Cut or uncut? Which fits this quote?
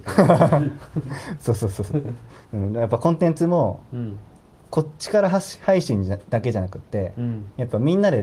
cut